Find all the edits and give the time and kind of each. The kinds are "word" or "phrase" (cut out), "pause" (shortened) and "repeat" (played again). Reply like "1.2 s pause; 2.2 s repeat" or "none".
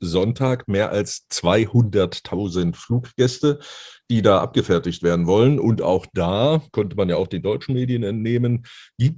none